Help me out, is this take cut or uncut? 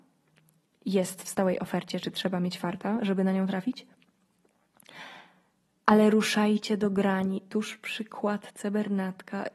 uncut